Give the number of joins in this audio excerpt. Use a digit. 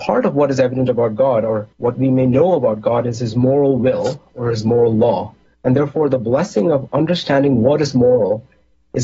2